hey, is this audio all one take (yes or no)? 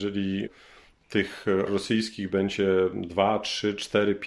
no